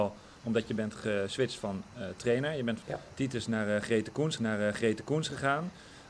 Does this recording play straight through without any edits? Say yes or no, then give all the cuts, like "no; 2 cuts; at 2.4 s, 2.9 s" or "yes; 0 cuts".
no; 2 cuts; at 2.8 s, 4.4 s